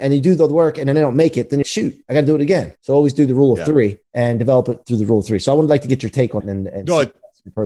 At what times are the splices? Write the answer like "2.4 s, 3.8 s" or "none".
1.6 s, 2.8 s, 4.0 s, 6.4 s